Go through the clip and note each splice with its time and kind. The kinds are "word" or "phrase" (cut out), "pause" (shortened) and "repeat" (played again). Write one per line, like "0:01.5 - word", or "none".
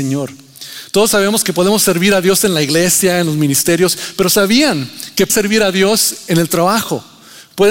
0:05.3 - word